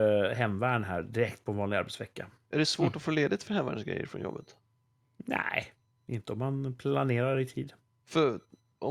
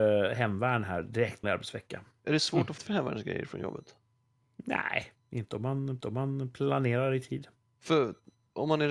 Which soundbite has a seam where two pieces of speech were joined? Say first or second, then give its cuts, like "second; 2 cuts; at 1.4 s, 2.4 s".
second; 4 cuts; at 1.4 s, 2.8 s, 5.2 s, 6.0 s